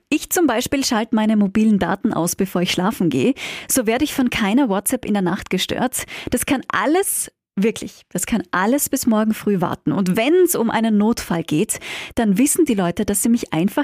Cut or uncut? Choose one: uncut